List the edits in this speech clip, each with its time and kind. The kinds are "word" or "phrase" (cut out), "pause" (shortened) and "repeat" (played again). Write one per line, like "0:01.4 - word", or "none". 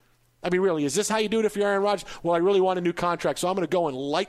none

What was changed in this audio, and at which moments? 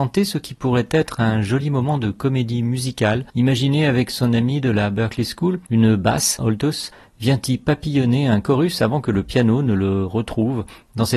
0:03.3 - pause
0:06.4 - phrase

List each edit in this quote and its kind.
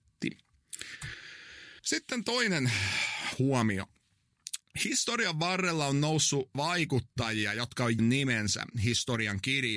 0:01.8 - pause
0:06.5 - word
0:08.0 - word

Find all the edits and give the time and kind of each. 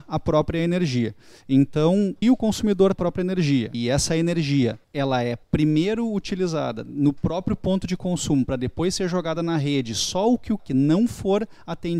0:02.2 - word
0:02.9 - phrase
0:03.7 - word
0:04.8 - pause
0:05.4 - pause
0:10.6 - phrase

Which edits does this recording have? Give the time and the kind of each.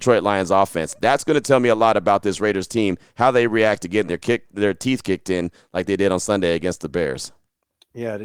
none

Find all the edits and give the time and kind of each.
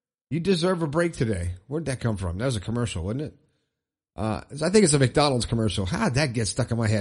none

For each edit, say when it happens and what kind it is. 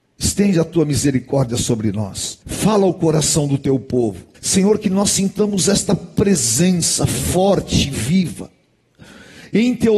0:02.4 - pause
0:04.3 - pause

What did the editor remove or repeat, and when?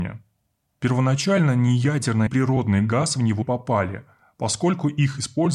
0:02.3 - phrase
0:03.4 - word

